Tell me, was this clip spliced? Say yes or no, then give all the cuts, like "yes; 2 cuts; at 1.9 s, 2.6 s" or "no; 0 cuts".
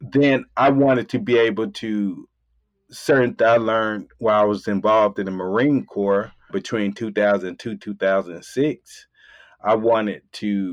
yes; 2 cuts; at 3.4 s, 6.5 s